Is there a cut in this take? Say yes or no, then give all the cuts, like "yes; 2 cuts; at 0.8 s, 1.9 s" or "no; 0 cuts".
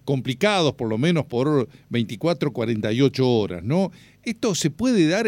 no; 0 cuts